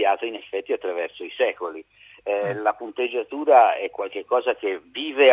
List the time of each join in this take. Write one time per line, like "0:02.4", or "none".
none